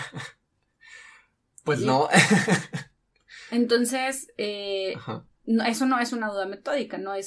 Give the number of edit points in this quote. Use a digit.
0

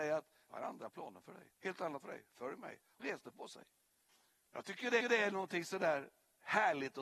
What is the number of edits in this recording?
5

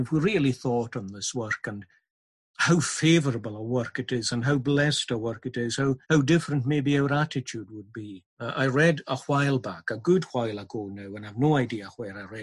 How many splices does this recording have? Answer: 2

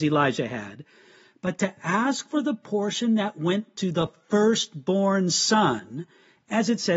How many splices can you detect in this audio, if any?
0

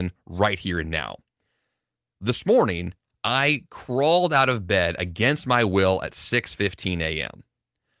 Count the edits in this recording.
0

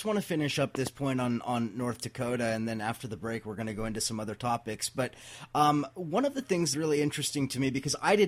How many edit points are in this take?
1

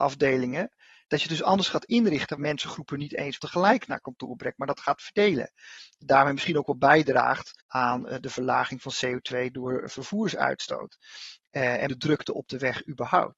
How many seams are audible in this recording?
4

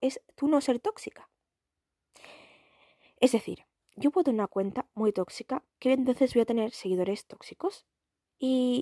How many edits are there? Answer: 0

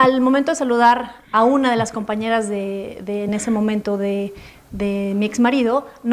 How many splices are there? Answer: 0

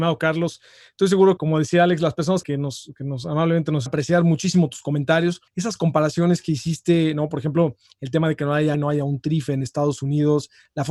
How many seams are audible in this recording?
5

